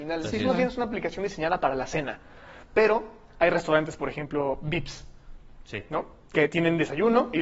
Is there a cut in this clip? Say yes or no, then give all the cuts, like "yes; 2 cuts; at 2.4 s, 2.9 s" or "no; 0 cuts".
no; 0 cuts